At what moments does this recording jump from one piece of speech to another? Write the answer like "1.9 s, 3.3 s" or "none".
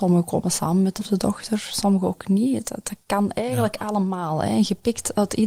1.0 s